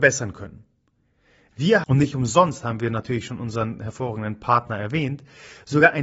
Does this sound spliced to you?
yes; 1 cut; at 1.8 s

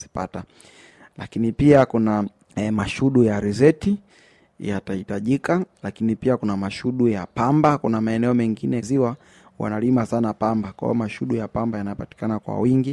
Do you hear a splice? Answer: yes; 3 cuts; at 2.4 s, 5.7 s, 8.8 s

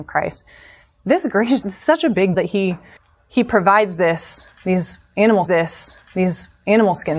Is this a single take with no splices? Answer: no; 4 cuts; at 1.6 s, 2.3 s, 3.0 s, 5.5 s

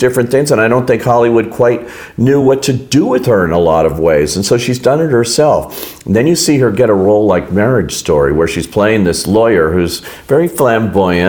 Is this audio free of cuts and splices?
yes; 0 cuts

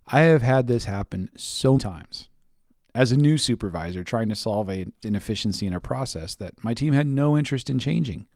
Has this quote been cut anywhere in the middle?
yes; 2 cuts; at 1.8 s, 5.0 s

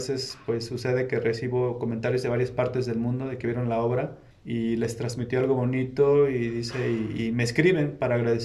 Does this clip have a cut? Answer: yes; 1 cut; at 4.3 s

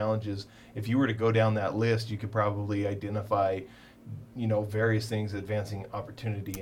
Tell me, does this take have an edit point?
no; 0 cuts

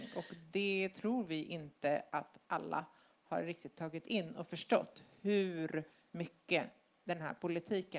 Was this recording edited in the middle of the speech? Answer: no; 0 cuts

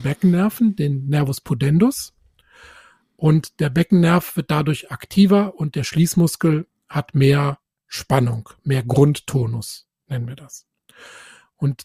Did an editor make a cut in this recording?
no; 0 cuts

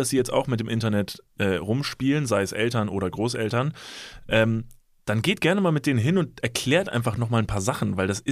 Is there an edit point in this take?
no; 0 cuts

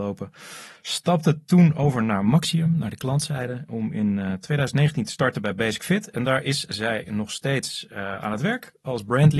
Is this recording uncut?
yes; 0 cuts

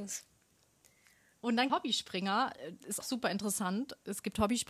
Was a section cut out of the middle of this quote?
yes; 2 cuts; at 1.7 s, 3.0 s

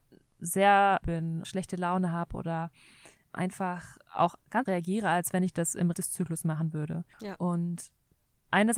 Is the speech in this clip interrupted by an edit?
yes; 6 cuts; at 1.0 s, 1.4 s, 3.3 s, 4.7 s, 5.9 s, 7.1 s

